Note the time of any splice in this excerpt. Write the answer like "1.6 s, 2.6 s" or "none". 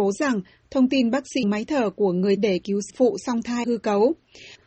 1.4 s, 2.4 s, 2.9 s, 3.6 s